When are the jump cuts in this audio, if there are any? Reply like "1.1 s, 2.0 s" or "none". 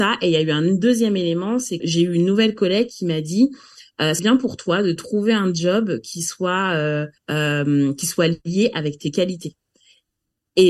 1.8 s, 4.2 s, 7.2 s